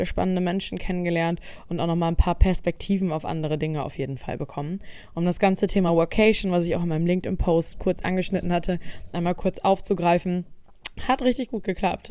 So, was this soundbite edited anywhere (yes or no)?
no